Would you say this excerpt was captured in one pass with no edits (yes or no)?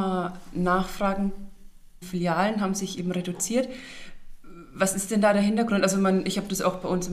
no